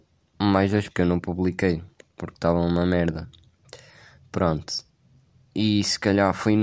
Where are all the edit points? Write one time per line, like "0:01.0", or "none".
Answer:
0:00.9

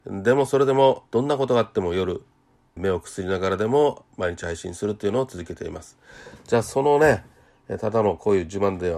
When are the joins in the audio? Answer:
0:01.1
0:02.8

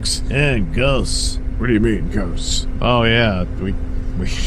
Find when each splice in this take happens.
none

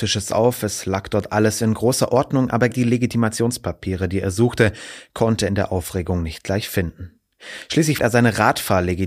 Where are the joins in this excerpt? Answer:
0:02.7
0:05.5
0:08.0

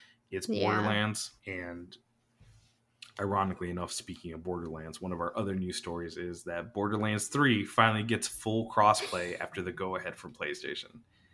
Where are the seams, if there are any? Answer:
0:01.4

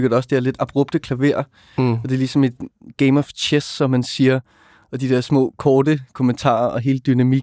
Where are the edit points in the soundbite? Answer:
none

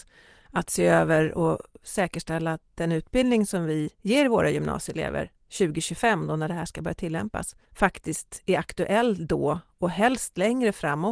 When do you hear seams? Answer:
0:03.9
0:07.6

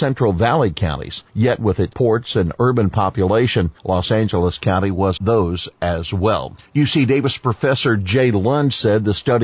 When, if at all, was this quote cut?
0:01.3
0:01.9
0:03.8
0:05.2
0:06.7

